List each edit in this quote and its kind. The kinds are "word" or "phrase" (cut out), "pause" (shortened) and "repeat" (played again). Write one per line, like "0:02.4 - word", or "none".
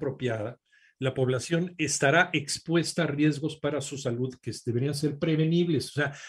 none